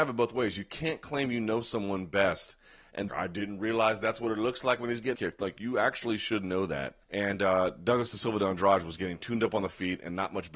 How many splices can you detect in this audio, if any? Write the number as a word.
three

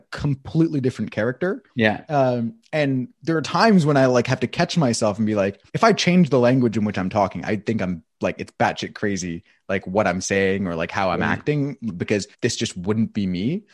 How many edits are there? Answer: three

